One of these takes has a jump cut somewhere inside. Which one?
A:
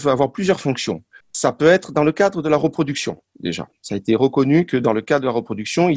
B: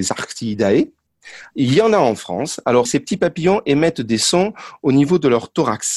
A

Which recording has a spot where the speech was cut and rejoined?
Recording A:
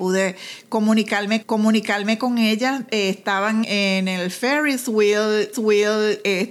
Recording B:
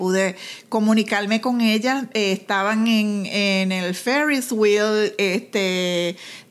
A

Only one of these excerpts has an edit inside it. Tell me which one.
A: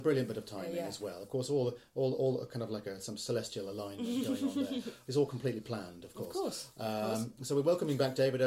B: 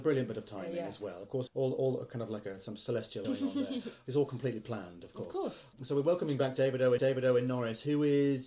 B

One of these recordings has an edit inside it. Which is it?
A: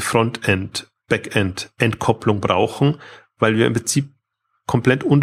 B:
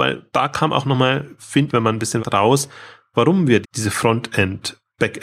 B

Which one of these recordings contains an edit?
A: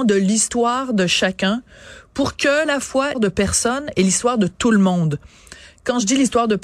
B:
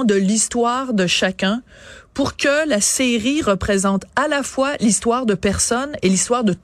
A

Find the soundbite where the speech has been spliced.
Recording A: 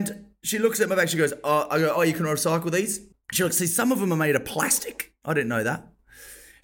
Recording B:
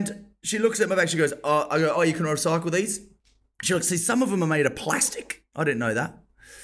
A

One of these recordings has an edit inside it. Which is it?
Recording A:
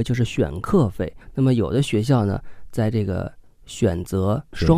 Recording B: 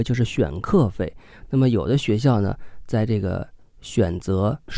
A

